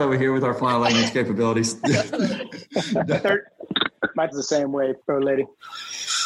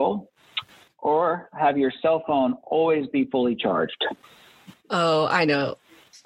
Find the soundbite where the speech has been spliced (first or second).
first